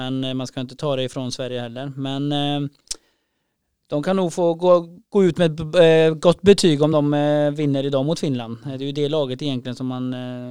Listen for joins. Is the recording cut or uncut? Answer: uncut